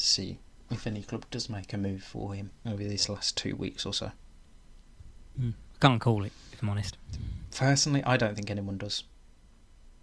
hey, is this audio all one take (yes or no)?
yes